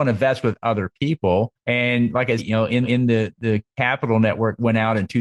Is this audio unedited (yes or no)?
no